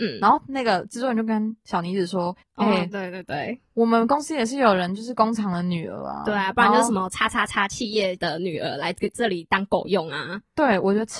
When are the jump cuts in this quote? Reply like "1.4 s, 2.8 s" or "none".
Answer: 2.4 s